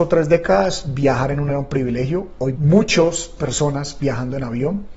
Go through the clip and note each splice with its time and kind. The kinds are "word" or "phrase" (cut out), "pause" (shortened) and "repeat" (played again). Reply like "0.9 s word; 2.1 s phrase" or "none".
1.5 s word; 2.5 s word; 3.4 s word